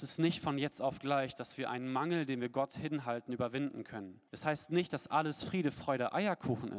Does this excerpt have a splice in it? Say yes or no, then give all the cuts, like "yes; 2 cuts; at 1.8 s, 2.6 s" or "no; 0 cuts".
yes; 1 cut; at 4.3 s